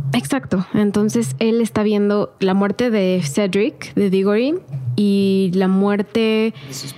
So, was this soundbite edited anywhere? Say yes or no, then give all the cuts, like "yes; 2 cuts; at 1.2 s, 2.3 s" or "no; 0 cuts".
no; 0 cuts